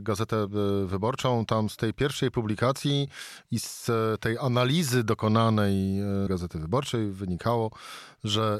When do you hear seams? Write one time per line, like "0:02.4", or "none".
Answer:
0:06.3